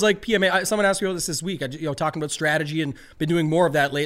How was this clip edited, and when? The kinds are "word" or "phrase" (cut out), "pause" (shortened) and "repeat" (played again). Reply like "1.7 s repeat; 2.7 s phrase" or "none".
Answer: none